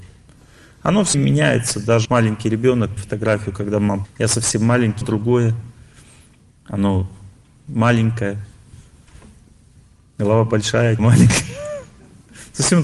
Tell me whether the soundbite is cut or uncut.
cut